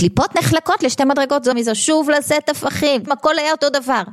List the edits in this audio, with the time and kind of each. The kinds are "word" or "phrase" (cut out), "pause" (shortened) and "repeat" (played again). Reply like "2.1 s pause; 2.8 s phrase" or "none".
1.5 s word; 3.1 s word